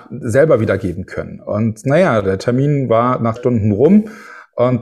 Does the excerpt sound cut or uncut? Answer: cut